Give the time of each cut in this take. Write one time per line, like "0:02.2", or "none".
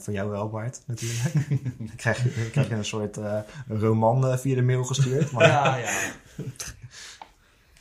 none